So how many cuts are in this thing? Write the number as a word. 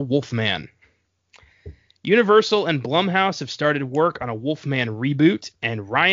zero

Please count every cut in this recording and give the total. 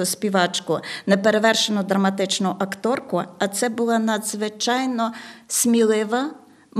zero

